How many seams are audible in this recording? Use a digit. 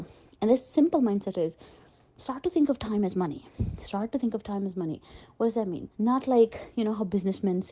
2